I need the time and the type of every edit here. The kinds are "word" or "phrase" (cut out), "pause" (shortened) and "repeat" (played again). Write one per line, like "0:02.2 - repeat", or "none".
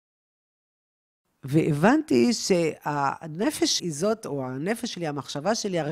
0:03.8 - word